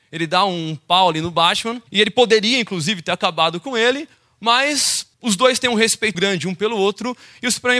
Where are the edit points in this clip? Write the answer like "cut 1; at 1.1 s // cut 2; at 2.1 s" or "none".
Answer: cut 1; at 1.9 s // cut 2; at 5.1 s // cut 3; at 6.1 s